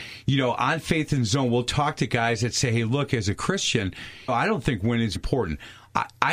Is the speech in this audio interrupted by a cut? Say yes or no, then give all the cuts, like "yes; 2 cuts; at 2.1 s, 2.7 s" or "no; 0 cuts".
yes; 2 cuts; at 4.3 s, 5.2 s